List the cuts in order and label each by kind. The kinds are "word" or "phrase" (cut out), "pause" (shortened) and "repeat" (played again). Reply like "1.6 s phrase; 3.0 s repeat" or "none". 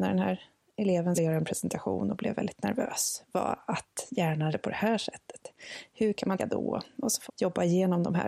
1.2 s word; 4.5 s word; 6.4 s word; 7.3 s word